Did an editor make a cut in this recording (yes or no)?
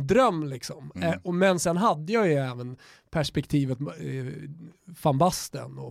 no